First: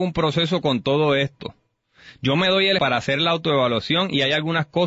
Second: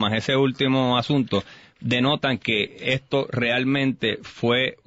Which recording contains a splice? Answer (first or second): first